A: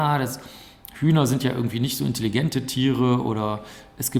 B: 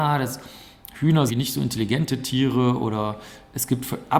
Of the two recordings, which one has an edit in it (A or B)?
B